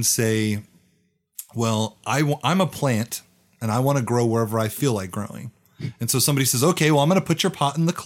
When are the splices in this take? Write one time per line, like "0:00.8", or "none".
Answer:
none